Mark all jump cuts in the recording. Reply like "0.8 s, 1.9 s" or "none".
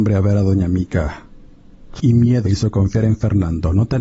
2.0 s, 2.5 s

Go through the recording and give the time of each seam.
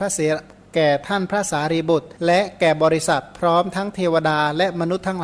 2.2 s

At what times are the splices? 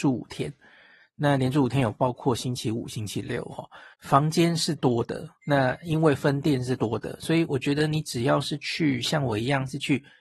3.9 s, 5.4 s

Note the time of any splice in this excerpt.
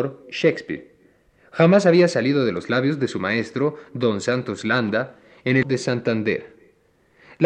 5.6 s

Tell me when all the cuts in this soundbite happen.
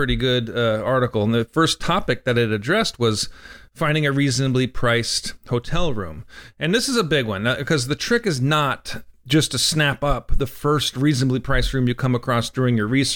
none

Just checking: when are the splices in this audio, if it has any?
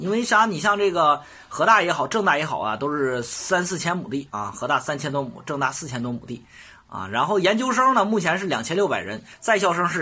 none

